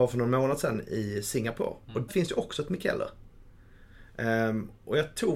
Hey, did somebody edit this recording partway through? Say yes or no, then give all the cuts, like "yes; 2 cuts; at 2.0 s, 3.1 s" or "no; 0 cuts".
yes; 1 cut; at 2.1 s